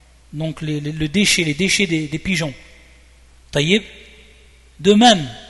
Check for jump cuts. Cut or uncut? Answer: uncut